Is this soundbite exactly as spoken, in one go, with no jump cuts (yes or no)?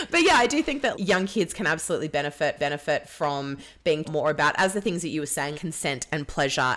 no